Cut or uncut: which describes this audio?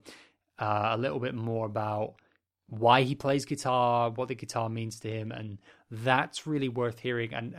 uncut